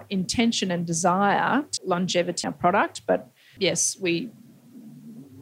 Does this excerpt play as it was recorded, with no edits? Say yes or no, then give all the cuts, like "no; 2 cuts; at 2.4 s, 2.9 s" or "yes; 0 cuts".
no; 3 cuts; at 1.8 s, 2.4 s, 3.6 s